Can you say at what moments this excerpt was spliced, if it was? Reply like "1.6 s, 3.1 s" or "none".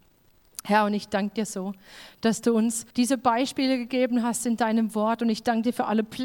2.9 s